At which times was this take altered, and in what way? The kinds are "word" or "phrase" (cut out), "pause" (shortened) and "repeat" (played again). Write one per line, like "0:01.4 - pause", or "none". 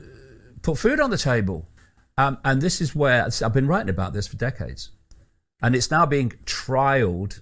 0:01.8 - pause